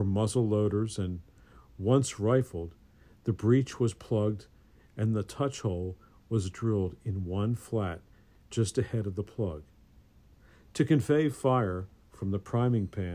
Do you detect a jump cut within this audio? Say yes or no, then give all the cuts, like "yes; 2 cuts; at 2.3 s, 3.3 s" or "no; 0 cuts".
no; 0 cuts